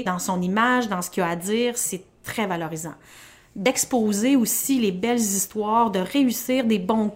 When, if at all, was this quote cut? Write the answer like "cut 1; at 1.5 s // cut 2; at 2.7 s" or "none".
none